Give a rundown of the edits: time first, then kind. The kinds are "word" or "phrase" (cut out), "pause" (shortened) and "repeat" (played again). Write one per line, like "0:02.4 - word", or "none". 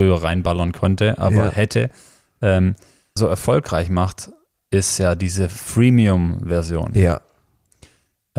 0:03.2 - phrase